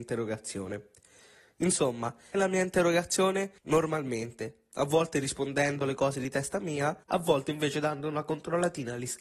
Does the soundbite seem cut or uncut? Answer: cut